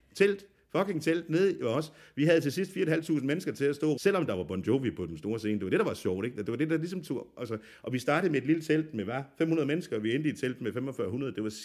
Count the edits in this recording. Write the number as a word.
zero